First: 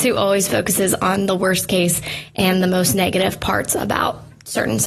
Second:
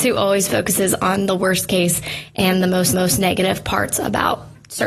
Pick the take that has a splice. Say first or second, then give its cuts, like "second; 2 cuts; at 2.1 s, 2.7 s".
second; 1 cut; at 2.9 s